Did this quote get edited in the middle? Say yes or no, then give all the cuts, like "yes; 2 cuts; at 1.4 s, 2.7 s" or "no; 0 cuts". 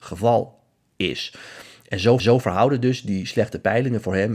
yes; 1 cut; at 2.2 s